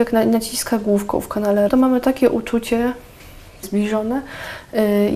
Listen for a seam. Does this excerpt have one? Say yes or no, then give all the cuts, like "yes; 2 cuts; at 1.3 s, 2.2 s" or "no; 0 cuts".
yes; 2 cuts; at 1.7 s, 3.6 s